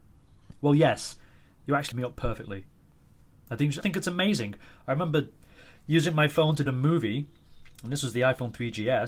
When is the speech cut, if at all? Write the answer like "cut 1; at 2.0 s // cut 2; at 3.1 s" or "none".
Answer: cut 1; at 1.9 s // cut 2; at 3.8 s // cut 3; at 6.7 s